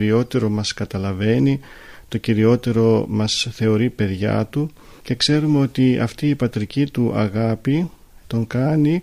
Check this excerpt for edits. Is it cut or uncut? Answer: uncut